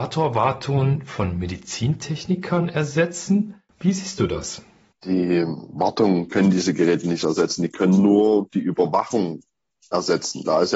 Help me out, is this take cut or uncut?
uncut